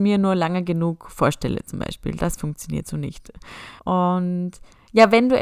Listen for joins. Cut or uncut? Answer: cut